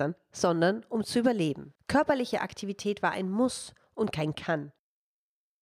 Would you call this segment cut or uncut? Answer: cut